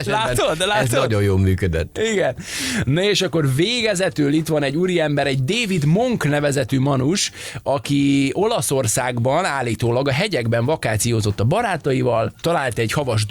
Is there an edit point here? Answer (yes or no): no